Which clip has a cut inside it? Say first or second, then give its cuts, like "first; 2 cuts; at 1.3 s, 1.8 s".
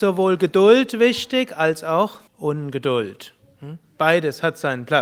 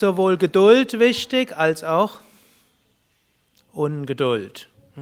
first; 1 cut; at 2.3 s